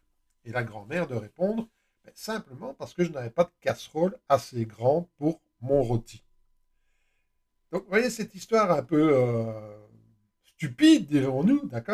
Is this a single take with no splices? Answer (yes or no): yes